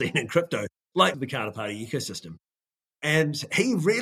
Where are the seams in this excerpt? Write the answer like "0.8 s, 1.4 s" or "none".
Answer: 1.1 s